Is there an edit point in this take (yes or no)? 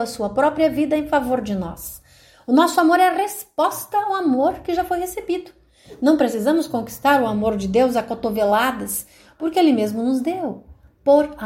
no